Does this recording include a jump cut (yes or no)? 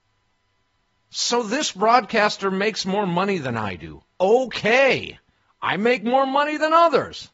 no